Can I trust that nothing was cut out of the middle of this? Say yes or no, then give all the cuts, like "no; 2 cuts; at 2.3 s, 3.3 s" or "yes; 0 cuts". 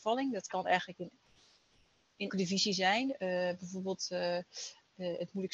no; 1 cut; at 2.3 s